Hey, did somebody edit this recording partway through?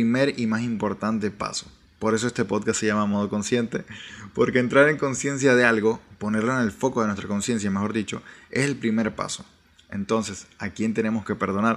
no; 0 cuts

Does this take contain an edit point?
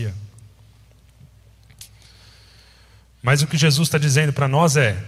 no; 0 cuts

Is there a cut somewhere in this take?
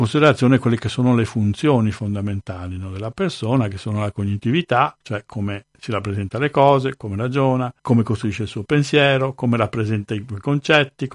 yes; 2 cuts; at 5.0 s, 7.8 s

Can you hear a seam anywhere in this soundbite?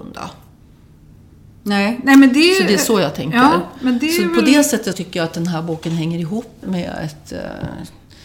yes; 2 cuts; at 4.9 s, 6.6 s

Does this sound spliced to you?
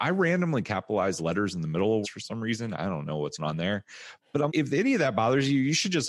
yes; 3 cuts; at 2.0 s, 3.4 s, 4.5 s

